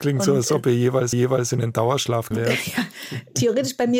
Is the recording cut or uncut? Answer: cut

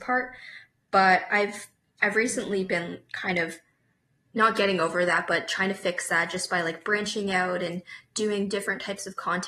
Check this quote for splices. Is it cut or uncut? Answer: uncut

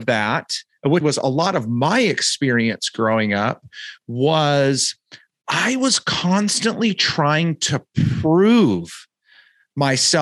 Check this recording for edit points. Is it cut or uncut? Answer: cut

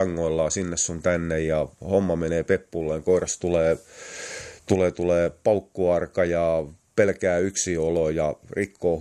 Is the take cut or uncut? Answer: cut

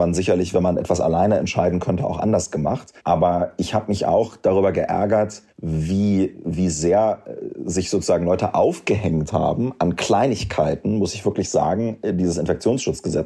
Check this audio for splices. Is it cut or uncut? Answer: cut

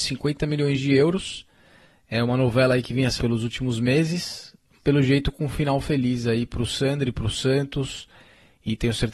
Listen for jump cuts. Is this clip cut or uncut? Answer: cut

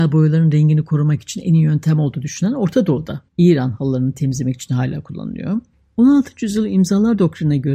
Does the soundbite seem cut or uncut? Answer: cut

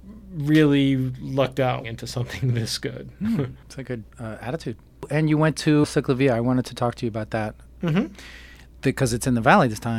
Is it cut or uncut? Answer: cut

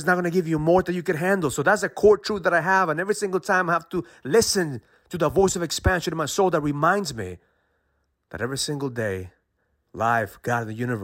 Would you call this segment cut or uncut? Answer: uncut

